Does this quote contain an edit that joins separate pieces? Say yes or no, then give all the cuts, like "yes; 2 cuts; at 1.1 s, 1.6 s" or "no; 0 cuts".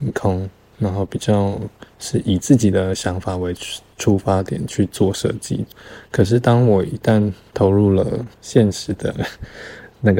yes; 1 cut; at 8.3 s